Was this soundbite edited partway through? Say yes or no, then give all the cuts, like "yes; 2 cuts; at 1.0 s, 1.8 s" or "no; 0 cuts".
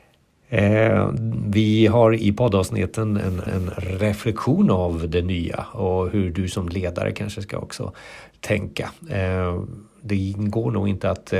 yes; 1 cut; at 3.5 s